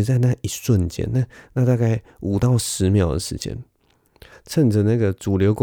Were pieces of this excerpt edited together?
no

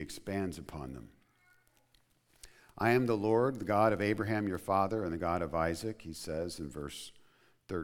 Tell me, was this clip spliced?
no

